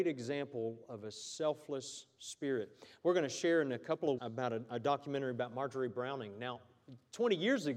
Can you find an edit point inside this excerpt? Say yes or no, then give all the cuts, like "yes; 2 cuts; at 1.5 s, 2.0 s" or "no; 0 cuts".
yes; 1 cut; at 4.2 s